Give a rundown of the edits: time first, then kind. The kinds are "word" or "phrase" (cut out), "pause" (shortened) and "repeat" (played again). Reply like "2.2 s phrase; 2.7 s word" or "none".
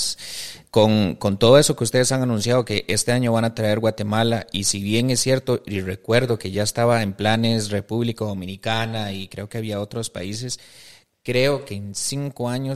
none

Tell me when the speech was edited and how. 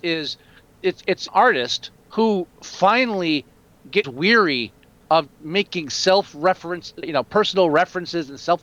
1.3 s word; 2.0 s pause; 4.0 s word; 5.3 s word; 7.0 s word

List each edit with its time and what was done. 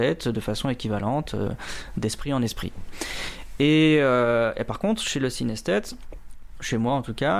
none

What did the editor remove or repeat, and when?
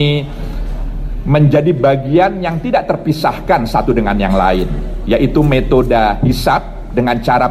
none

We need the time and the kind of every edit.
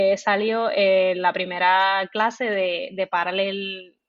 none

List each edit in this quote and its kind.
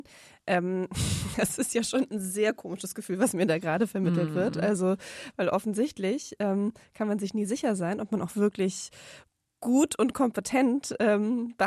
none

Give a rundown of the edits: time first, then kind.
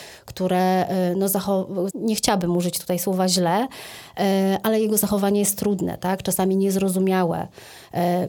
1.9 s phrase

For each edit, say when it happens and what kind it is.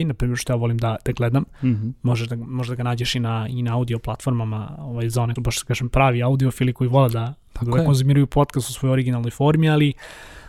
5.4 s phrase

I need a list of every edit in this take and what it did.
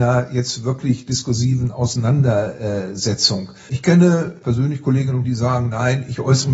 4.4 s phrase; 5.2 s word

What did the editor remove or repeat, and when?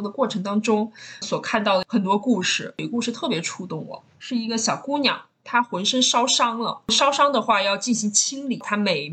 1.2 s word; 4.1 s pause

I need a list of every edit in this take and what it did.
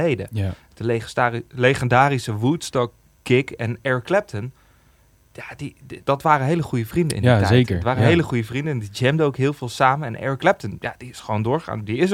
6.0 s word

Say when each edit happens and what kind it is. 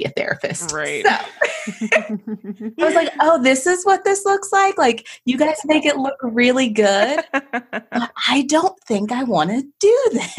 none

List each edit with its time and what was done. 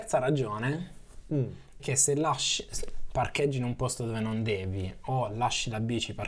1.8 s word; 3.1 s word

